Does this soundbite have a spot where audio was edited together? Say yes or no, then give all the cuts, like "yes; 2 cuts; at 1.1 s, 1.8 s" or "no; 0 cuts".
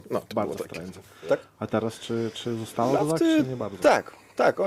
no; 0 cuts